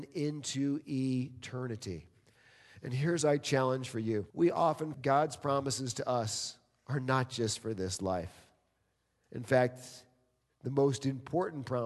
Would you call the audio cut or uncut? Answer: cut